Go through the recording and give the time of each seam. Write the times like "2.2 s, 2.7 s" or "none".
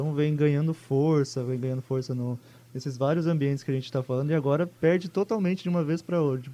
4.8 s